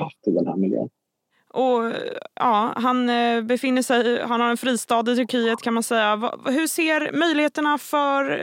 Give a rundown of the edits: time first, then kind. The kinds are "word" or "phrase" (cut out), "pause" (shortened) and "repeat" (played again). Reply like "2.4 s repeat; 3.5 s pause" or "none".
none